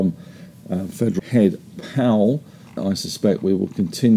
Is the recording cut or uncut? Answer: cut